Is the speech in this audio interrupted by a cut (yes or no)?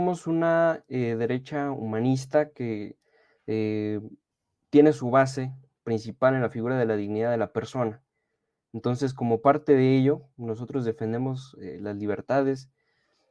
no